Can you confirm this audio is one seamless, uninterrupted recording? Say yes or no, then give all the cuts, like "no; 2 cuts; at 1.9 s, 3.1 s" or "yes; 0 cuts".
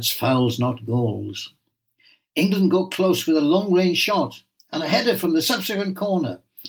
yes; 0 cuts